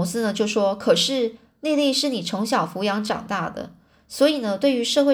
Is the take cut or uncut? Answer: uncut